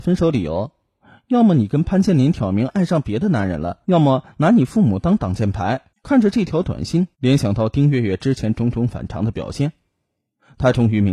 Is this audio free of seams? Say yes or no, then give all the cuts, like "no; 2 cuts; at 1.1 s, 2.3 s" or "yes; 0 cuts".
no; 3 cuts; at 3.8 s, 5.9 s, 7.1 s